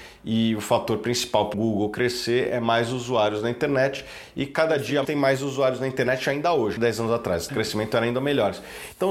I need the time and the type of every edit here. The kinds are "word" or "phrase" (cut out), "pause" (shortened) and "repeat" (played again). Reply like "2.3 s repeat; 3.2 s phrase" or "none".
1.5 s word; 5.0 s word; 6.8 s word; 7.5 s word